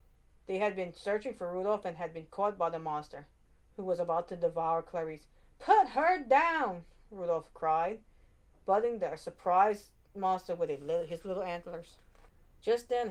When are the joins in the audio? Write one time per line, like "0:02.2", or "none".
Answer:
none